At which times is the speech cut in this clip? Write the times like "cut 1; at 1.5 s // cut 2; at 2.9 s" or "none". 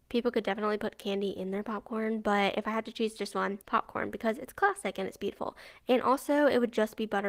cut 1; at 3.6 s